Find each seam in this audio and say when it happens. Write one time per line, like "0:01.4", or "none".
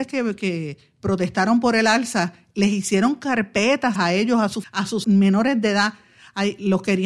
0:04.0
0:04.6
0:05.0